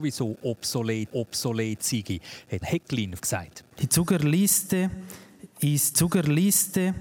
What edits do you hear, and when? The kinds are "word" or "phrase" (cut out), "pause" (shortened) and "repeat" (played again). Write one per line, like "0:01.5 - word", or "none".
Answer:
0:01.1 - repeat
0:02.6 - word
0:03.2 - phrase
0:03.7 - pause
0:05.9 - repeat